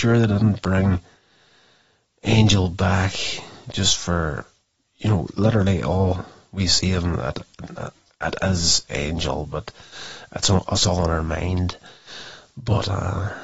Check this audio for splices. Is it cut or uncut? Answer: uncut